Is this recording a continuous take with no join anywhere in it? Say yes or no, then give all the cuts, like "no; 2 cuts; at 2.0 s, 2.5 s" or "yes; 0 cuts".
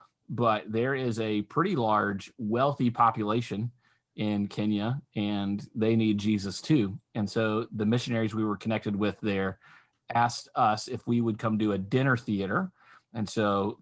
yes; 0 cuts